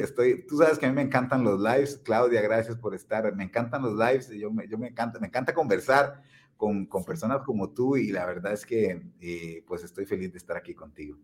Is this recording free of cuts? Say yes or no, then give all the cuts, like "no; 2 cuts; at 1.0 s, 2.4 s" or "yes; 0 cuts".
yes; 0 cuts